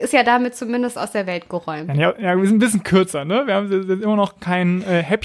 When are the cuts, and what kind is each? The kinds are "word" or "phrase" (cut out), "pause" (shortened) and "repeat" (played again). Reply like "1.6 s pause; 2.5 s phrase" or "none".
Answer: none